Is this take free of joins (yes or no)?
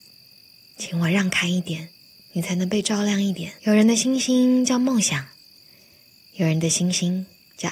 no